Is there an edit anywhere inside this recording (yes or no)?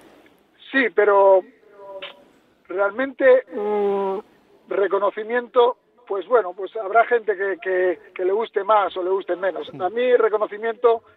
yes